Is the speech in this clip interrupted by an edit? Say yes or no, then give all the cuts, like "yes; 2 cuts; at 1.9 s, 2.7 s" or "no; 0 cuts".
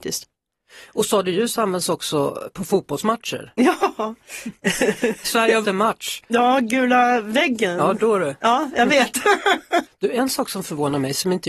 yes; 2 cuts; at 5.2 s, 5.6 s